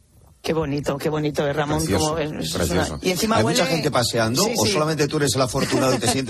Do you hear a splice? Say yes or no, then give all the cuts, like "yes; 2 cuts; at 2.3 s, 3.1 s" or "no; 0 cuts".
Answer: no; 0 cuts